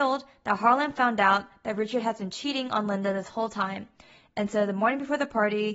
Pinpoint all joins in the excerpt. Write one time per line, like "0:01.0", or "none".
none

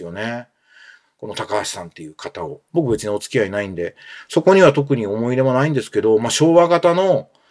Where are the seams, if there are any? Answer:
none

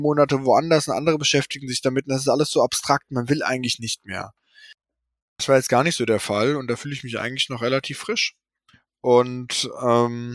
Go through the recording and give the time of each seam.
none

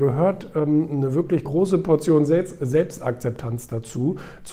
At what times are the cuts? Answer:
0:01.4

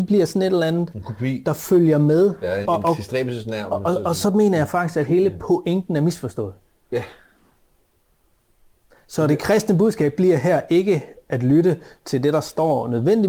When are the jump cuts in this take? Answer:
0:02.6

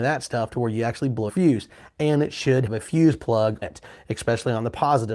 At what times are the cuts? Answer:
0:01.3
0:02.7
0:03.6

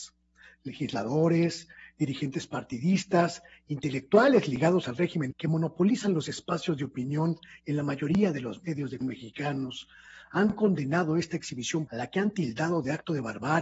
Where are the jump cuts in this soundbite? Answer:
0:05.3
0:09.0
0:11.9

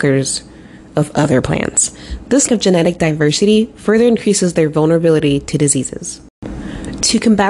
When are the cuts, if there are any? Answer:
0:02.5

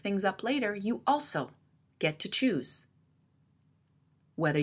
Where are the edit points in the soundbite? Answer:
none

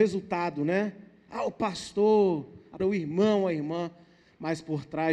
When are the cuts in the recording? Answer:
0:02.8

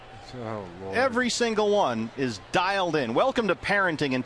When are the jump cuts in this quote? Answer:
0:02.4

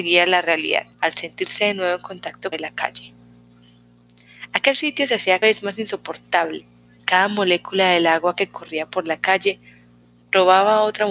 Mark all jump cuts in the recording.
0:00.9
0:02.5
0:05.4
0:07.0

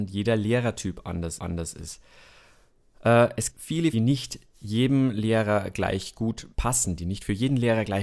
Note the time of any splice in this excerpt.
0:01.4
0:03.5
0:03.9
0:06.5

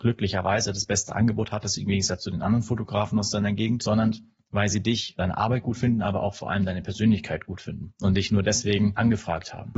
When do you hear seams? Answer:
none

